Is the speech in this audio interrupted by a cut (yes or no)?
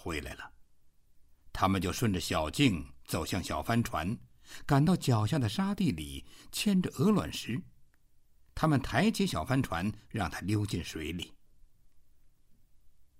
no